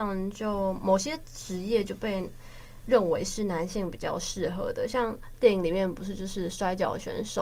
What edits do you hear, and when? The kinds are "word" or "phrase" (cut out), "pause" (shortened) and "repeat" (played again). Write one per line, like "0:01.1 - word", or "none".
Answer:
none